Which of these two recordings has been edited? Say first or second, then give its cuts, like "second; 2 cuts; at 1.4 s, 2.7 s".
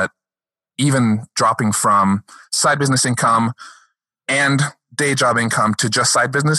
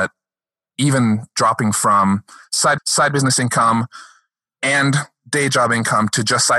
second; 1 cut; at 2.8 s